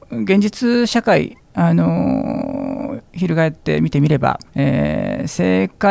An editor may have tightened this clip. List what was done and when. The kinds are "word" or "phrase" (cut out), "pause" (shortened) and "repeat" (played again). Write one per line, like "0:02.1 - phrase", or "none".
0:04.5 - pause